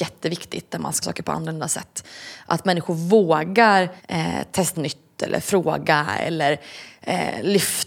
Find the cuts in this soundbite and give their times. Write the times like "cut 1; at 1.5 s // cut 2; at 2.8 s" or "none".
cut 1; at 1.0 s // cut 2; at 4.0 s // cut 3; at 4.7 s

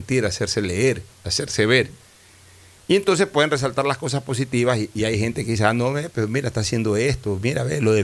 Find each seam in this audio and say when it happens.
none

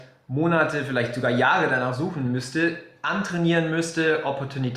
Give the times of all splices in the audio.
none

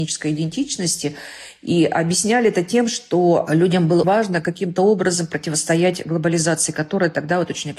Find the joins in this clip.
cut 1; at 4.0 s

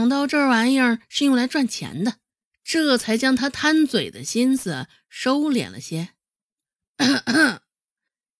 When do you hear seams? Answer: cut 1; at 2.3 s

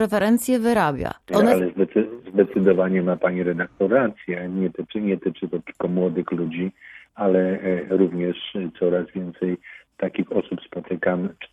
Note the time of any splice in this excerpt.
cut 1; at 1.2 s

